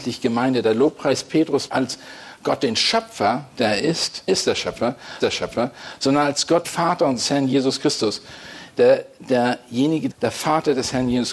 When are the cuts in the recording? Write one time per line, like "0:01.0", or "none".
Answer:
0:01.7
0:04.3
0:05.2
0:06.6
0:10.1

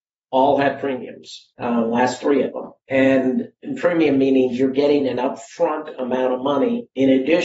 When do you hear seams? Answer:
0:01.5
0:02.8

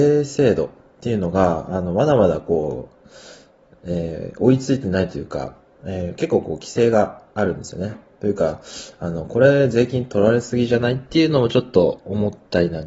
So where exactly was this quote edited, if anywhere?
none

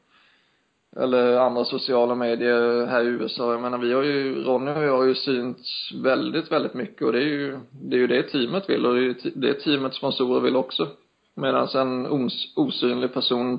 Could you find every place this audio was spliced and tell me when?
none

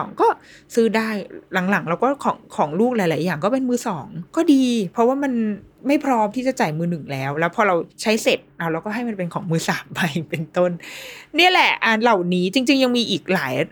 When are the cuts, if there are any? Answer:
0:02.4
0:04.3
0:05.7
0:07.9

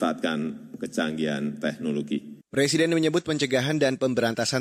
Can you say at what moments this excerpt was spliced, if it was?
0:02.4

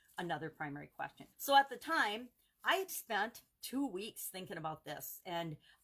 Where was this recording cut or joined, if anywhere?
0:01.3
0:02.9

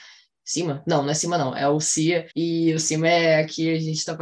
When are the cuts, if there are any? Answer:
0:02.3

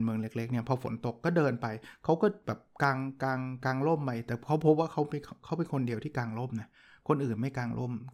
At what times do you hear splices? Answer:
none

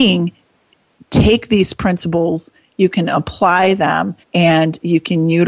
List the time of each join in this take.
0:04.2

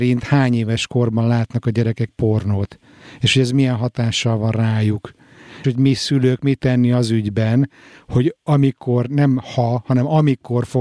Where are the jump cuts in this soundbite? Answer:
0:02.1
0:05.6
0:06.6

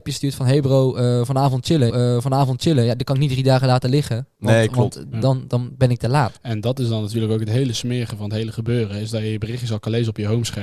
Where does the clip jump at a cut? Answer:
0:01.9
0:05.1
0:06.4

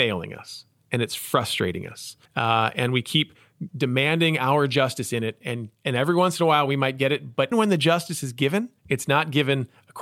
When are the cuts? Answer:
0:02.3
0:03.7
0:05.7
0:07.5
0:08.8

